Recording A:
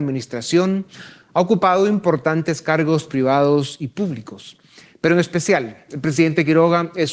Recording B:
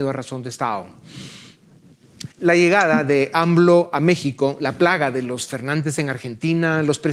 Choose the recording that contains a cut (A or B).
B